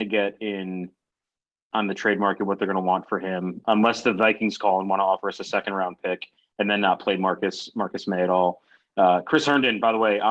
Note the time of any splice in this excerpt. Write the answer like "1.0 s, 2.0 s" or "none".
none